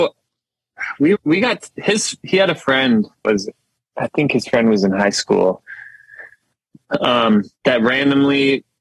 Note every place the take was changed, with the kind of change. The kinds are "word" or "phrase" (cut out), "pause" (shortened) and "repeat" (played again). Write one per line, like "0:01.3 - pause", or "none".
0:01.1 - word
0:03.2 - word
0:07.5 - pause